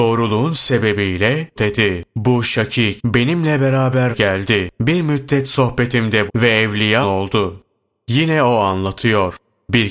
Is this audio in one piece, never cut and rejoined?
no; 7 cuts; at 1.6 s, 2.1 s, 3.0 s, 4.1 s, 4.7 s, 6.3 s, 7.0 s

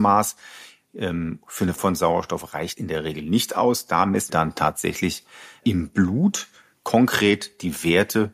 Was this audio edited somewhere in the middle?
yes; 4 cuts; at 1.8 s, 2.8 s, 4.3 s, 5.6 s

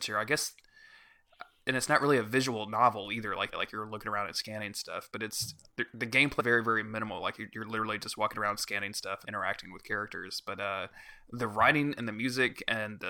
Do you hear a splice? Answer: yes; 3 cuts; at 3.5 s, 6.4 s, 9.2 s

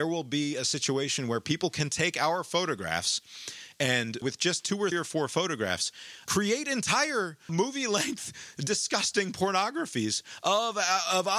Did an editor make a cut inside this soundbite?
yes; 3 cuts; at 4.2 s, 4.9 s, 7.5 s

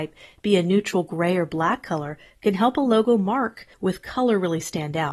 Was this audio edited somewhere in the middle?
yes; 1 cut; at 3.7 s

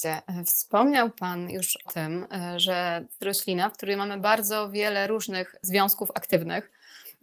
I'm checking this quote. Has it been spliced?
yes; 2 cuts; at 1.9 s, 3.2 s

